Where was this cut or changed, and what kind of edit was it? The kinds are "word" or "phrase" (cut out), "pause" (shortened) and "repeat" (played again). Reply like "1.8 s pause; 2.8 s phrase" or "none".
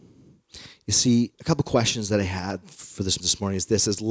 1.3 s pause; 3.2 s word